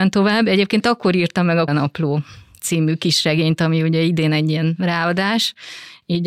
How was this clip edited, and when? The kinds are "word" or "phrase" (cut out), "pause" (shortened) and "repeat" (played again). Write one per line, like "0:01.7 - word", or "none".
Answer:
0:01.7 - word